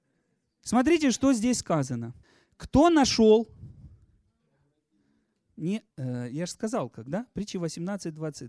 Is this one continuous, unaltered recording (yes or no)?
no